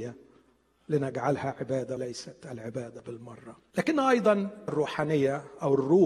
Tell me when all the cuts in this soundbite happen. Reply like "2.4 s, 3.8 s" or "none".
2.0 s, 3.7 s, 4.7 s